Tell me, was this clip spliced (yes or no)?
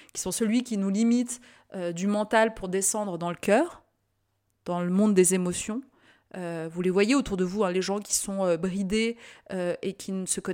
no